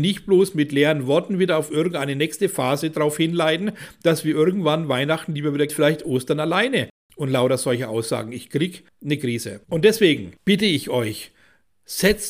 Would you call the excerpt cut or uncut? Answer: cut